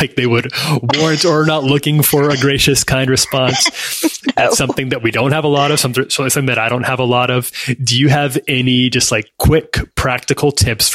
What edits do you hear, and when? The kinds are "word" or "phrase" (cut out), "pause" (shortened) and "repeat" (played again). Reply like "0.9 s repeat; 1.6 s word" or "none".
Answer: 9.3 s pause